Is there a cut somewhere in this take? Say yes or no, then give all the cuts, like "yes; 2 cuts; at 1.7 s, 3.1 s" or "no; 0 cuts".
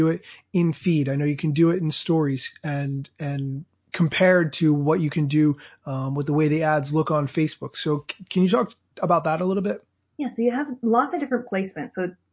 no; 0 cuts